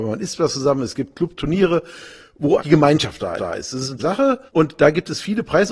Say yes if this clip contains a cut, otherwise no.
yes